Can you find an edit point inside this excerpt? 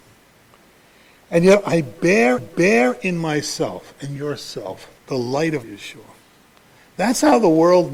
yes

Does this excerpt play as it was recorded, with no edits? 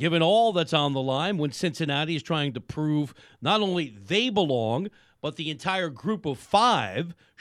yes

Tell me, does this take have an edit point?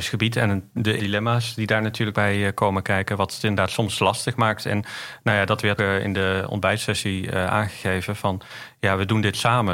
yes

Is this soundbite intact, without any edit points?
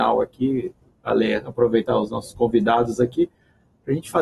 yes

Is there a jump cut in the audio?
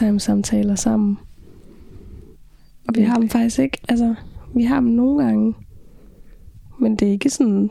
no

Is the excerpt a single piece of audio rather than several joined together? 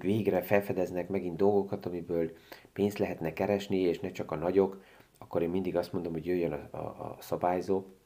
yes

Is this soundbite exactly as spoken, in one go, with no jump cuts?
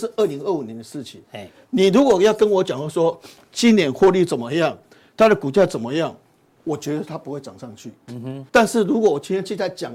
no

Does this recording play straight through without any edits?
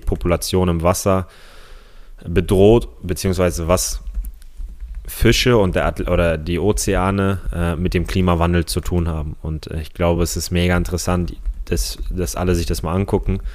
yes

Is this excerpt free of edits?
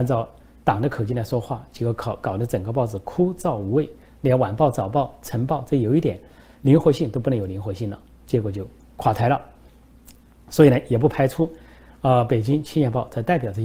yes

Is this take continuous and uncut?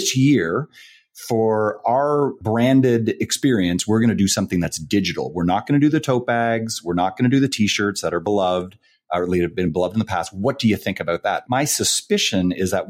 yes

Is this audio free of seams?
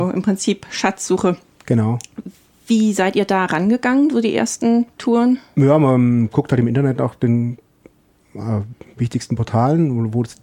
yes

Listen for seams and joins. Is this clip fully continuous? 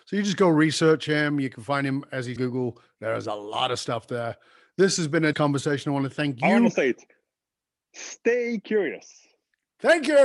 no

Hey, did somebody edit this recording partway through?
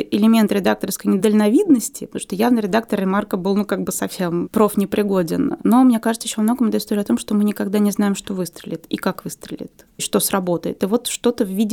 no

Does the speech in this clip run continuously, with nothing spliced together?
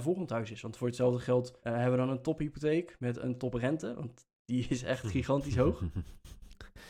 no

